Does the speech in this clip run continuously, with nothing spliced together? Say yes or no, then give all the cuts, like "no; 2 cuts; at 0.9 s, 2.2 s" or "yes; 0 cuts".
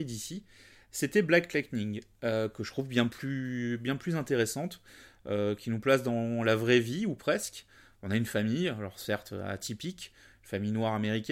yes; 0 cuts